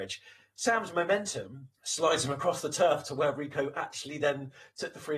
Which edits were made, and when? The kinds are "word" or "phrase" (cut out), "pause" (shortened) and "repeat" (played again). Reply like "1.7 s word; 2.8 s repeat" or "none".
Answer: 1.7 s pause